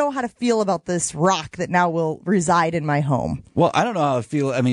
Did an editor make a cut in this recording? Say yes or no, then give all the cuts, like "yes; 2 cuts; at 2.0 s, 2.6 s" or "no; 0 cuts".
no; 0 cuts